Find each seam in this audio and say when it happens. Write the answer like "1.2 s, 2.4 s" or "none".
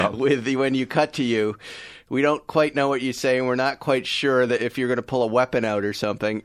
none

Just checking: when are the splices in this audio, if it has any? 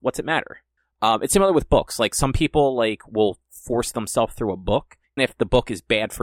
5.2 s

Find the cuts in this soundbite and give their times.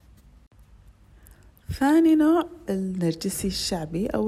2.6 s

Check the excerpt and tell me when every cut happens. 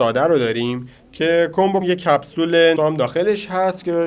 1.8 s, 2.8 s

